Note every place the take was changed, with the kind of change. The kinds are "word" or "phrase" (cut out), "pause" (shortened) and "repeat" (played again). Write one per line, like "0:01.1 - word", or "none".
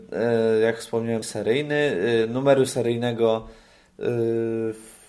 0:01.2 - word